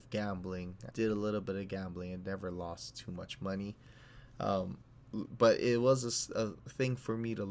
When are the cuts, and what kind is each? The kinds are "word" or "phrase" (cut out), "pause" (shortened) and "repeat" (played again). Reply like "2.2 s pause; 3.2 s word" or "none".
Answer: 0.9 s word